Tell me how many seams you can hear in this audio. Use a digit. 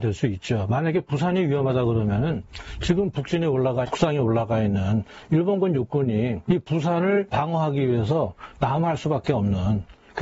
1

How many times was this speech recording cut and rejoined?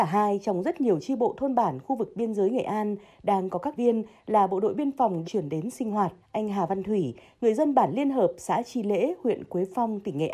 3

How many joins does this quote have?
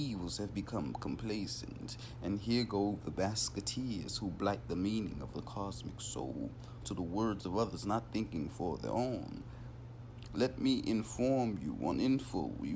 1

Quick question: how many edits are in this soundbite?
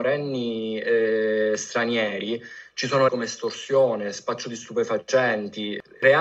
1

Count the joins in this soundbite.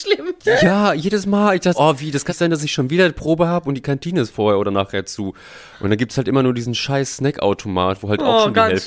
2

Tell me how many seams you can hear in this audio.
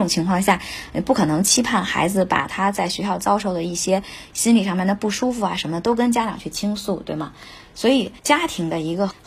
1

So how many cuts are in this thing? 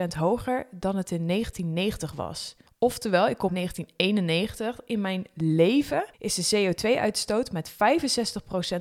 3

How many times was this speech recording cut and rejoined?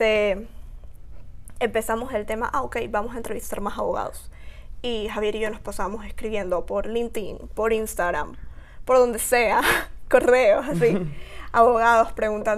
0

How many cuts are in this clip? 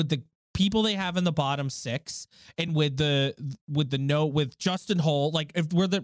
0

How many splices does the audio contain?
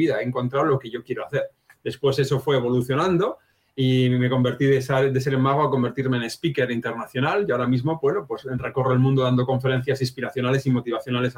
0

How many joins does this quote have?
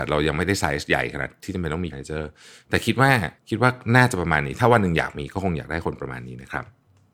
2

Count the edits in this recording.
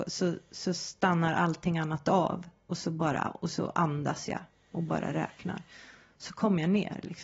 0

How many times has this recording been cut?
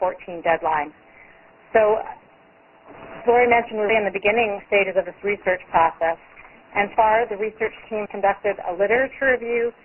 4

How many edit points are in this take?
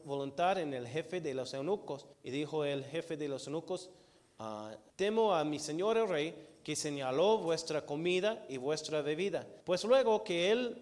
3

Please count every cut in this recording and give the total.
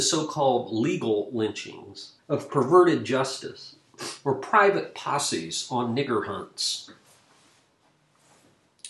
1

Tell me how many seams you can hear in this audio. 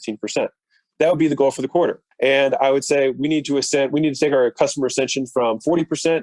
1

